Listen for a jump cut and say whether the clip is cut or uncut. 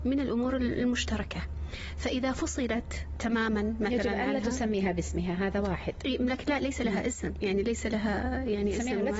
uncut